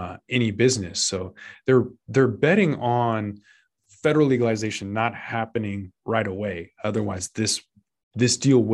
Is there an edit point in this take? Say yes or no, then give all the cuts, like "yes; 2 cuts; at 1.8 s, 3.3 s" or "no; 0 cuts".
no; 0 cuts